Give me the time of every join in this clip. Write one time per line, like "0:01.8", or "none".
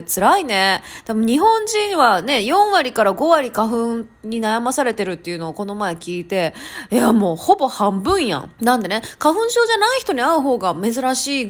0:08.5